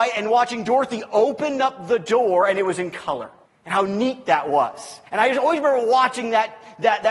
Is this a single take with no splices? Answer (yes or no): no